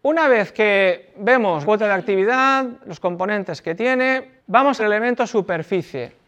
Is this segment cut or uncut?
cut